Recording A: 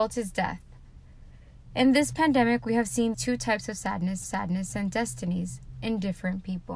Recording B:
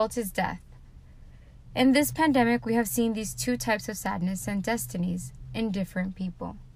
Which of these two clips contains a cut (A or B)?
A